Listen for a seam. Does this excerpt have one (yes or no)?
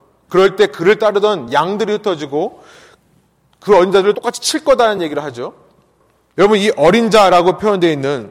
no